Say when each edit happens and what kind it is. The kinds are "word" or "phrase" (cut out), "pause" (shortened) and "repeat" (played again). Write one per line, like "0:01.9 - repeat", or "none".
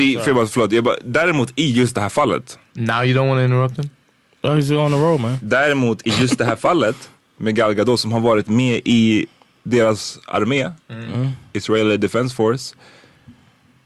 none

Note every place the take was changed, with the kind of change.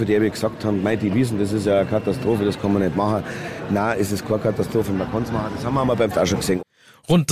0:06.1 - word

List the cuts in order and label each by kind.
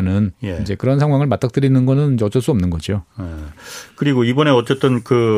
none

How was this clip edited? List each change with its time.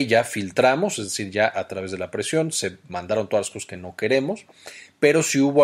none

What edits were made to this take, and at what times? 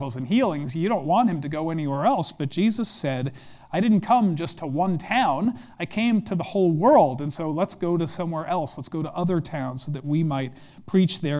none

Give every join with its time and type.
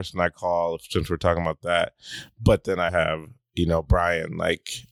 0:02.9 - word

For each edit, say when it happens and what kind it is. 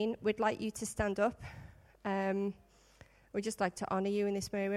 none

